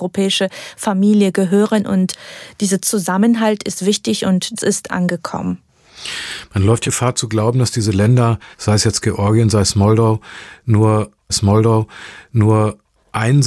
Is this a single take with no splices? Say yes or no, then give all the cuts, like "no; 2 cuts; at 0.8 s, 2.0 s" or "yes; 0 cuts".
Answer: no; 4 cuts; at 4.6 s, 6.8 s, 8.5 s, 11.3 s